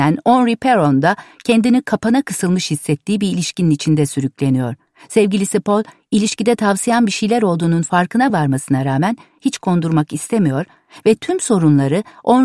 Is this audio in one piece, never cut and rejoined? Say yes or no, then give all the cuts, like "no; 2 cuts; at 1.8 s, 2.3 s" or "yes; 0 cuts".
yes; 0 cuts